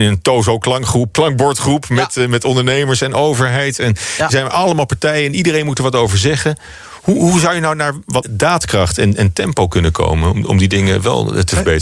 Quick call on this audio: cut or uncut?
cut